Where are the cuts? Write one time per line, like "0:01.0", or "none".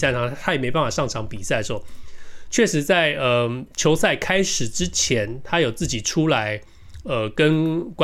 none